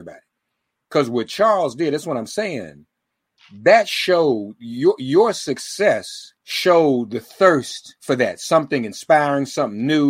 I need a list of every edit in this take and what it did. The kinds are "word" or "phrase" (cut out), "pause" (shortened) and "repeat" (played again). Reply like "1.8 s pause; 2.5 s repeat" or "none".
6.4 s pause; 8.0 s pause